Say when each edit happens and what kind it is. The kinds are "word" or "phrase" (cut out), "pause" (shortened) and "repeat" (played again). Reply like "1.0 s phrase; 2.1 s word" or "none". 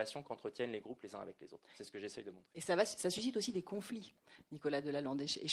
none